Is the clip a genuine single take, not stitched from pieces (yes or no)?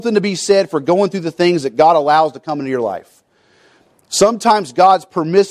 yes